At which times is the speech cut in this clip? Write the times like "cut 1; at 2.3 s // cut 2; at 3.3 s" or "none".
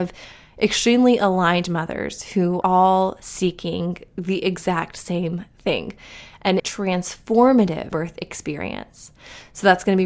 cut 1; at 2.6 s // cut 2; at 6.6 s // cut 3; at 7.9 s